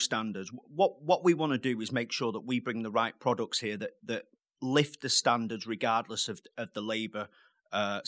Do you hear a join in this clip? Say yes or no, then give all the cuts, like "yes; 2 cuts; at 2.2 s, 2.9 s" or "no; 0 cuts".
no; 0 cuts